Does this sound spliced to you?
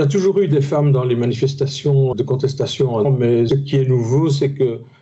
yes; 2 cuts; at 3.0 s, 3.5 s

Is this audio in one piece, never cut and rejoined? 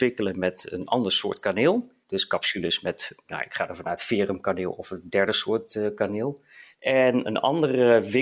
yes; 0 cuts

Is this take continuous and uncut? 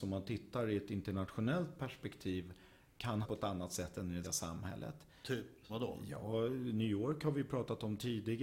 no; 3 cuts; at 3.2 s, 4.2 s, 5.7 s

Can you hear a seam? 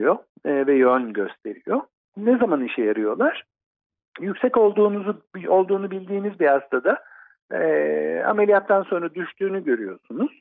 no; 0 cuts

